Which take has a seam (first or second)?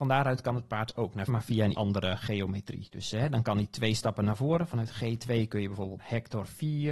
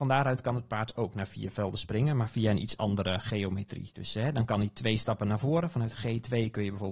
first